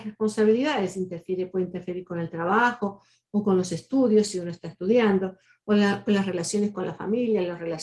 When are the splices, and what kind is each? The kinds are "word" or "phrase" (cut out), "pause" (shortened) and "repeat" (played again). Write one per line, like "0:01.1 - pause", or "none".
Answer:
none